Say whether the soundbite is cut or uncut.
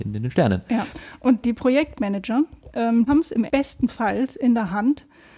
cut